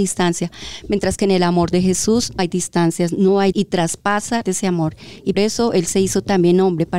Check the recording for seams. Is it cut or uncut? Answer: cut